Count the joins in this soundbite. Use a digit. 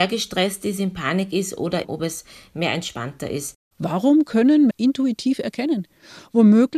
2